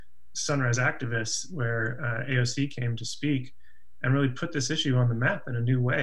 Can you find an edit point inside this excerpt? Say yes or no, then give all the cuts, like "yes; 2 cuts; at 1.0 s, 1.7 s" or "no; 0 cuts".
no; 0 cuts